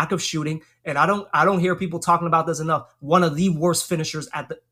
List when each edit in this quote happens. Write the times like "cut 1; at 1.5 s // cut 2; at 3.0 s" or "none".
none